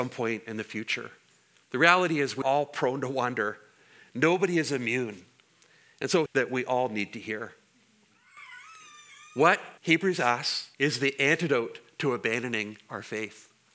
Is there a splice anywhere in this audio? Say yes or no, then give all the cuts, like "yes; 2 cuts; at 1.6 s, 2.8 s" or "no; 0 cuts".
yes; 4 cuts; at 2.4 s, 6.3 s, 9.8 s, 10.7 s